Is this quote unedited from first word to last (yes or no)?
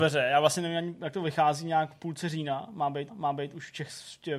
no